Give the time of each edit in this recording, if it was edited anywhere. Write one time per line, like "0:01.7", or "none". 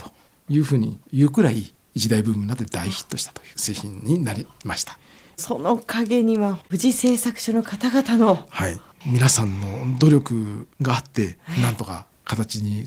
0:03.5